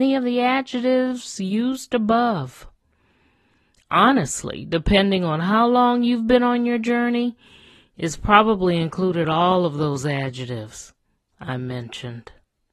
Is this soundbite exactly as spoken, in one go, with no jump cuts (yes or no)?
yes